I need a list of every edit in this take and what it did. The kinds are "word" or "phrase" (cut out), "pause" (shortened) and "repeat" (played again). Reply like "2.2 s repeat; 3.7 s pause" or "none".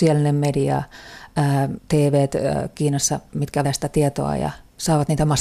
1.8 s word; 3.6 s word